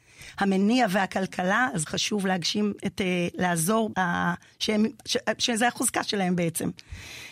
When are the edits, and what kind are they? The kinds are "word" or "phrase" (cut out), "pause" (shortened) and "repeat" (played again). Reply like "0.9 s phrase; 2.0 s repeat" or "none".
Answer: 1.9 s word; 2.9 s phrase; 3.9 s word